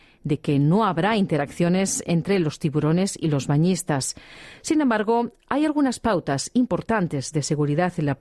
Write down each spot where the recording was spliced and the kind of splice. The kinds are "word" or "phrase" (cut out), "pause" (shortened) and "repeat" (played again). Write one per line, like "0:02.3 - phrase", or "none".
none